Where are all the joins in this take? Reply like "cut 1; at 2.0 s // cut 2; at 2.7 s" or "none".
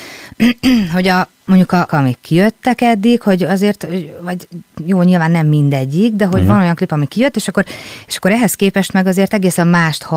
cut 1; at 1.9 s